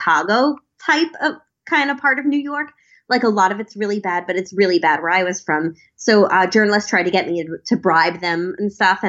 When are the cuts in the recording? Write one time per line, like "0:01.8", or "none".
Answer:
none